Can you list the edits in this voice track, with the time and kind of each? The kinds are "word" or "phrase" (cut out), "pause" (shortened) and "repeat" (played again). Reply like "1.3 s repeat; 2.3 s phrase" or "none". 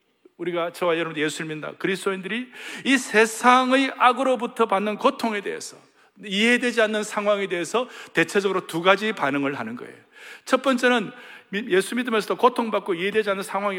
none